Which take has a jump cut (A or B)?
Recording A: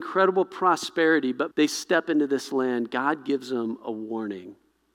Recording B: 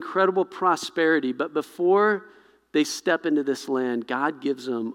A